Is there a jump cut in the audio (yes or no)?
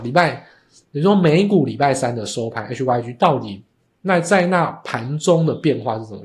no